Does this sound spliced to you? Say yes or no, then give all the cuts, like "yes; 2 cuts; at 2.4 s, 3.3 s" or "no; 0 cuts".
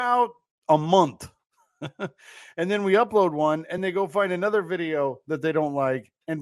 no; 0 cuts